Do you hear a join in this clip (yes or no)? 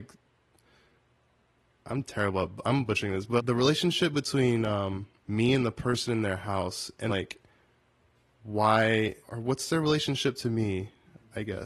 yes